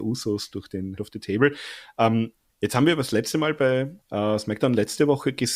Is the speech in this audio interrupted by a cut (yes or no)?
yes